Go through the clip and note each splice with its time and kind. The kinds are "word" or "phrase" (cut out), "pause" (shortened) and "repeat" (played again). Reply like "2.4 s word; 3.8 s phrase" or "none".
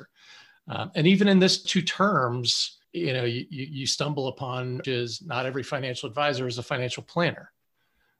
1.6 s word; 2.8 s pause; 4.8 s phrase